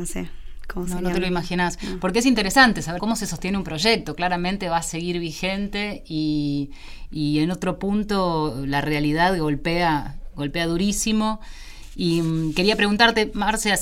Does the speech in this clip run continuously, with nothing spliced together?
no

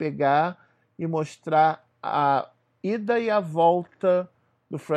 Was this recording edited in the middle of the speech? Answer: no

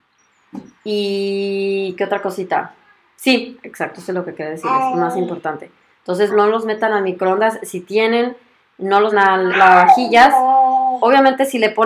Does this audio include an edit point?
yes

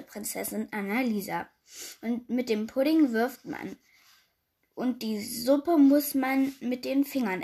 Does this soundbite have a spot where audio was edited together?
no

